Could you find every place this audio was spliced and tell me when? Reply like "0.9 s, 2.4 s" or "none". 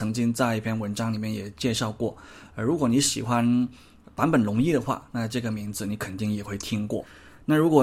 none